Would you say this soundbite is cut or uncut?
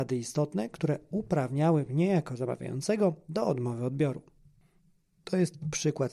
uncut